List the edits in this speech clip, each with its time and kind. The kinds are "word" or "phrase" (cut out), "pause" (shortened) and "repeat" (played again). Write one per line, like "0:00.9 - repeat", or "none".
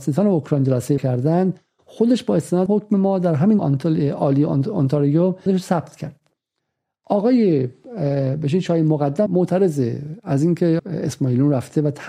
0:01.0 - word
0:02.7 - word
0:03.6 - word
0:05.5 - word
0:09.3 - word
0:10.8 - word